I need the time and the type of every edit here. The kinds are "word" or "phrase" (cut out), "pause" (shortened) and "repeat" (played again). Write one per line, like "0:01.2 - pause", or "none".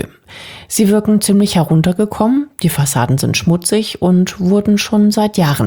none